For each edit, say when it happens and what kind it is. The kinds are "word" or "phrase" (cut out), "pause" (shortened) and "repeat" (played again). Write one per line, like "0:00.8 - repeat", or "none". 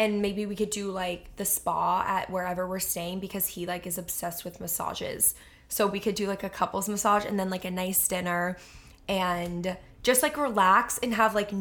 none